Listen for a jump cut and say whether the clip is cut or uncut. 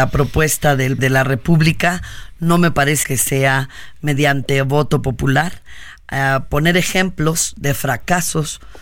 cut